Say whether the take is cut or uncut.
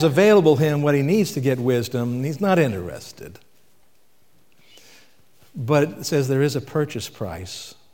uncut